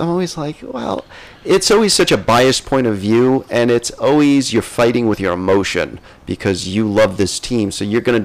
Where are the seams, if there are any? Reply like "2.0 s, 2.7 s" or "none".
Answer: none